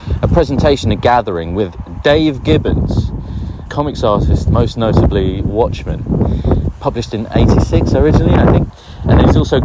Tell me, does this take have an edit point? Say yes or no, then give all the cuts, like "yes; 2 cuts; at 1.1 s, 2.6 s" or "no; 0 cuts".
yes; 1 cut; at 4.5 s